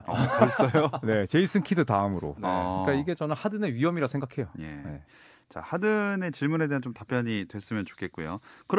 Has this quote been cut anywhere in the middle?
no; 0 cuts

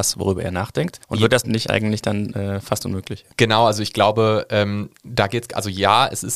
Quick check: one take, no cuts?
no; 4 cuts; at 1.0 s, 1.4 s, 3.3 s, 5.0 s

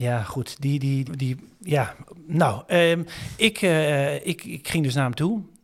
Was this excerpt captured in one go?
no; 1 cut; at 1.1 s

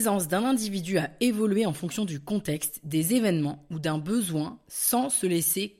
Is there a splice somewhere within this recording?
no; 0 cuts

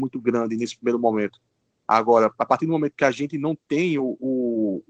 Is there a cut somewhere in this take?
no; 0 cuts

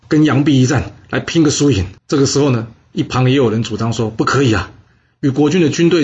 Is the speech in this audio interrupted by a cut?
yes; 1 cut; at 2.0 s

